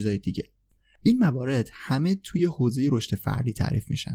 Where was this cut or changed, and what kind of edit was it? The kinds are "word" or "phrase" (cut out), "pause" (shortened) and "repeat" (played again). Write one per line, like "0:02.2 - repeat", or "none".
none

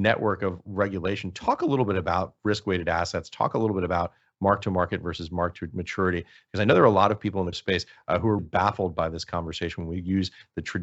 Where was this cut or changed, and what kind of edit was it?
0:07.5 - word
0:08.4 - word

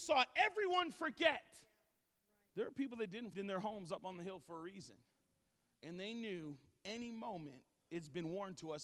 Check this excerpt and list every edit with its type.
0:03.3 - phrase

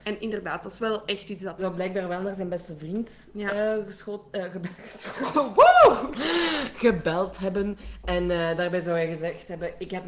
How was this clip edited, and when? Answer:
0:01.6 - phrase

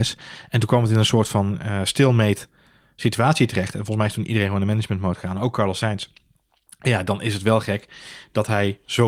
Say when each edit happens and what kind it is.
none

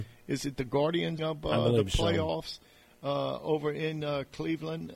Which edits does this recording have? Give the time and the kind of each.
0:01.2 - word

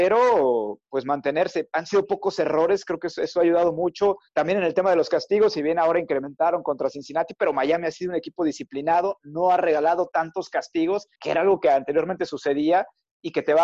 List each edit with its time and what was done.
0:04.3 - pause
0:11.1 - pause

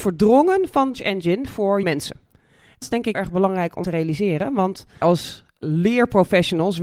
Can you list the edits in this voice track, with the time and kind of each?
0:00.9 - word
0:01.8 - word
0:02.8 - word
0:03.1 - word
0:03.8 - word
0:05.0 - word

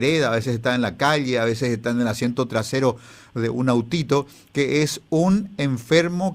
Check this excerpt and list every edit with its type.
none

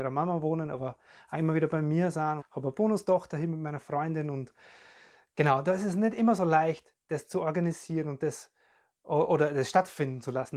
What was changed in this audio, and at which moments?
0:02.4 - word

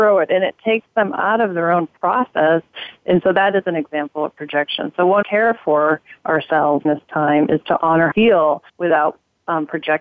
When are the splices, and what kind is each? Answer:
0:05.2 - phrase
0:06.8 - word
0:08.1 - word
0:08.7 - pause

